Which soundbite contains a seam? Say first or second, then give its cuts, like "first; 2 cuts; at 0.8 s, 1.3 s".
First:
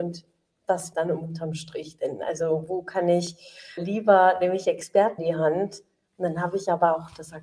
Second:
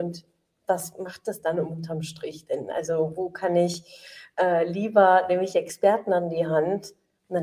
first; 3 cuts; at 0.9 s, 3.8 s, 5.2 s